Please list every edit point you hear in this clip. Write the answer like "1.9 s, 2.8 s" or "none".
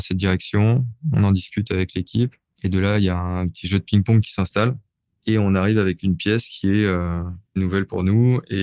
none

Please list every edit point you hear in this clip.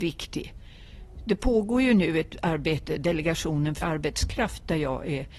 3.8 s

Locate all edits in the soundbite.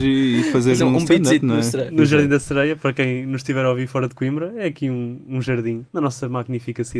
5.9 s

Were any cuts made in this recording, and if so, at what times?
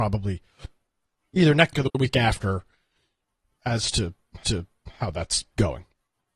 1.7 s, 4.4 s

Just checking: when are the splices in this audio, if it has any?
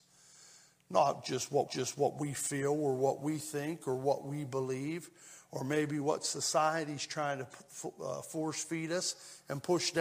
1.7 s

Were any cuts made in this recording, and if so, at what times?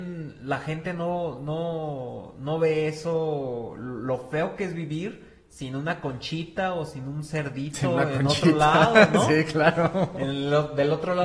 none

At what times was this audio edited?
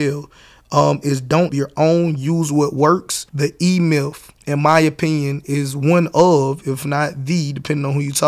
1.5 s, 3.3 s, 4.4 s

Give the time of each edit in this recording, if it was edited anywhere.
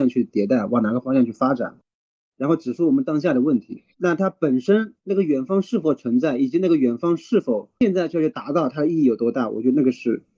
3.9 s, 5.0 s, 7.8 s

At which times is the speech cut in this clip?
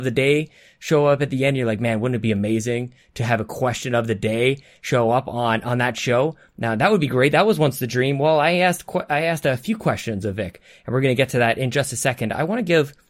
none

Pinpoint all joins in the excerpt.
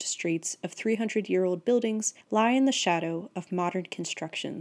2.2 s

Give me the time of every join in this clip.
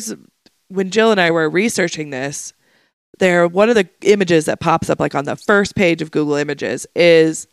none

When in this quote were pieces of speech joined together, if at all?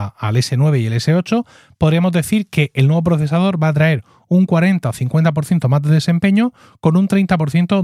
none

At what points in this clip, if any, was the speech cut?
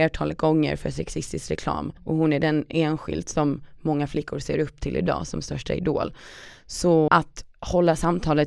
2.0 s, 7.1 s

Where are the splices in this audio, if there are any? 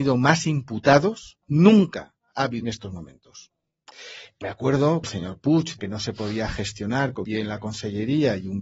1.4 s, 2.6 s, 4.4 s, 5.0 s, 5.8 s, 7.2 s

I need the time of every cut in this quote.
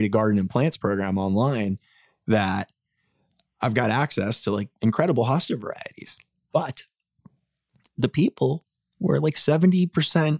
none

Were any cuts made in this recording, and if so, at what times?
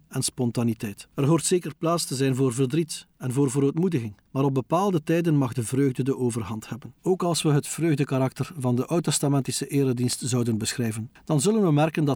1.1 s, 7.0 s

